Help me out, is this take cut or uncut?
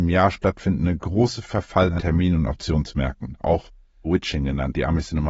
cut